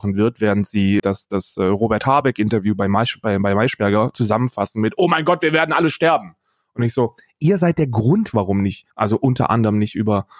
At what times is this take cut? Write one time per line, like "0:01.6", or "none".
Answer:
0:01.0
0:08.9